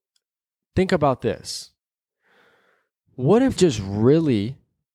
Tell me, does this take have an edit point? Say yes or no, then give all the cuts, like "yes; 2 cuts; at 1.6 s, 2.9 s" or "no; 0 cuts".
yes; 1 cut; at 3.6 s